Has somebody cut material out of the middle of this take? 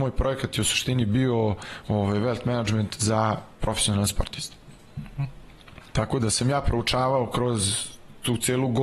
no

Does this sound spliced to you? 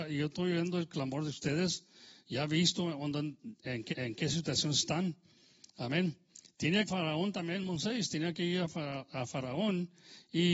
yes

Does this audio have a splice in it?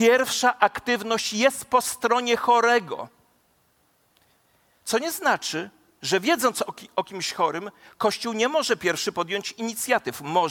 no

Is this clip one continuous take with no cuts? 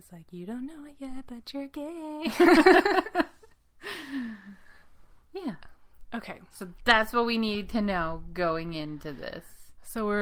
yes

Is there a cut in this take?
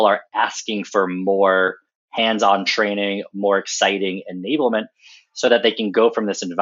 no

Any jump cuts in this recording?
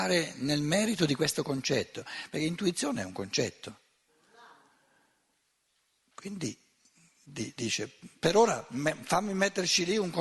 no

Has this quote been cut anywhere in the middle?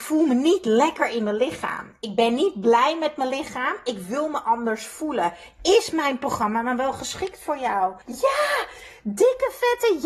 yes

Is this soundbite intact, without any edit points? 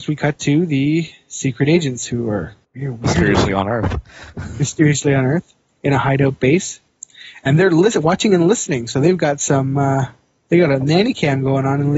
no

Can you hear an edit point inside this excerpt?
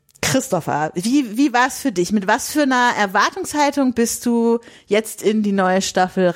no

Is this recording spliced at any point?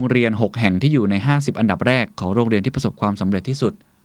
no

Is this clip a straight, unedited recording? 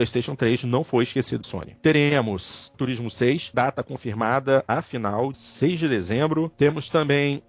no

